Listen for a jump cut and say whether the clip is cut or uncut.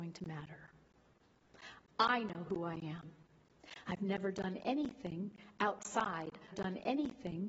cut